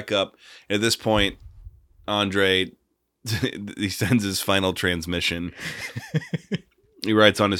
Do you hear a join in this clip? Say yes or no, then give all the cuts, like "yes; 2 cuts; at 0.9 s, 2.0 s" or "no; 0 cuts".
no; 0 cuts